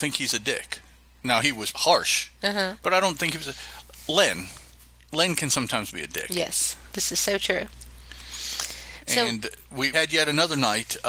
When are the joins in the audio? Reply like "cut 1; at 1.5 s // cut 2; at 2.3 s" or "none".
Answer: cut 1; at 1.4 s // cut 2; at 1.7 s // cut 3; at 9.9 s